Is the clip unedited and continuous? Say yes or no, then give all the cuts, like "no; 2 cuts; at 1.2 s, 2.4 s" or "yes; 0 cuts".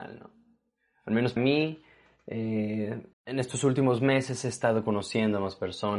no; 2 cuts; at 1.4 s, 3.1 s